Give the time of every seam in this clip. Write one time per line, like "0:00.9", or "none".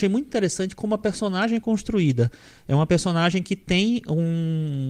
none